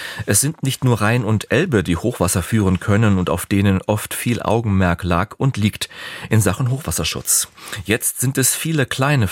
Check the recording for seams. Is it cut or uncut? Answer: uncut